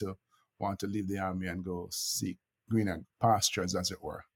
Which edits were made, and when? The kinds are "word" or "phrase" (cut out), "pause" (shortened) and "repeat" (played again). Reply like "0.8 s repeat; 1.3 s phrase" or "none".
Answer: 3.1 s pause